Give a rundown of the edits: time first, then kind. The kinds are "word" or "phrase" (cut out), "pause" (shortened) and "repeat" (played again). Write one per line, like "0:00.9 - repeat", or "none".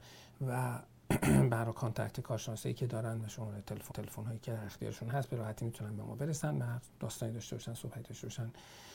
0:03.9 - repeat
0:07.0 - pause

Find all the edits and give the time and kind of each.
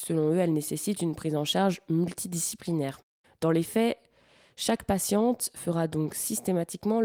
none

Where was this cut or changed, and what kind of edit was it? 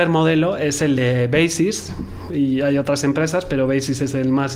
none

